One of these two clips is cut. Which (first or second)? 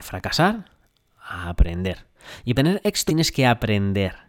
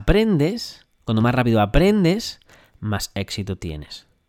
first